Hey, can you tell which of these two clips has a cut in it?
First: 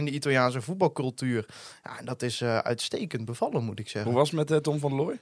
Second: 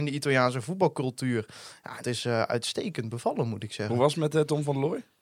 second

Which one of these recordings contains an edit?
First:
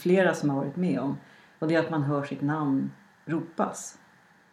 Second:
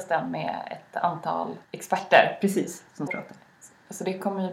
second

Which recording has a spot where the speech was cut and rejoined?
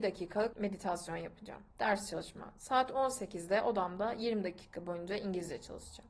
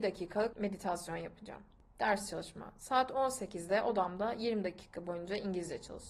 first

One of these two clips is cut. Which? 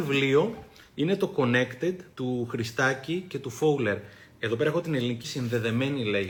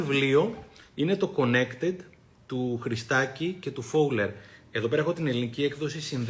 first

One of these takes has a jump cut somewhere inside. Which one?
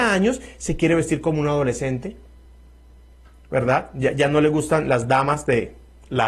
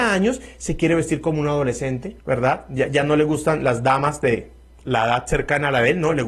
second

